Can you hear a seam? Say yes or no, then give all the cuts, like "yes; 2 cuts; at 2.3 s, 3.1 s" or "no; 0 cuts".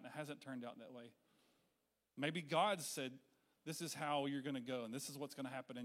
no; 0 cuts